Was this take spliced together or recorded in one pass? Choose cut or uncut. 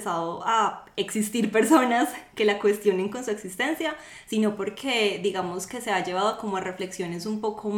uncut